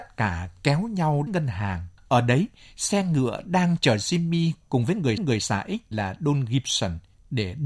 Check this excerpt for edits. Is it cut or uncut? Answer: cut